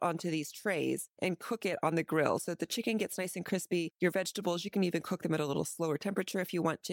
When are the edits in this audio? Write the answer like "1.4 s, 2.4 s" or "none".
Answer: none